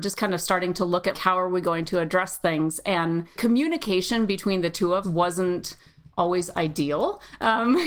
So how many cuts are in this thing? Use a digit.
3